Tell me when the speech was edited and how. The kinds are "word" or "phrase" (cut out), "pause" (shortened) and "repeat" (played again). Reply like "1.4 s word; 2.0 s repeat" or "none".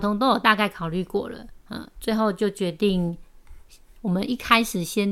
1.6 s pause